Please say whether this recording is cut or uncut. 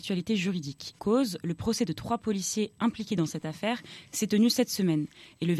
cut